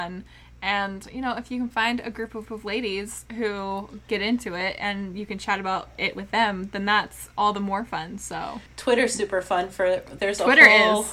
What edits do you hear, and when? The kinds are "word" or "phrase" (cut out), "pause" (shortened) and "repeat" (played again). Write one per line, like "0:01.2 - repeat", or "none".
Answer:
0:02.5 - repeat
0:08.7 - pause
0:10.2 - word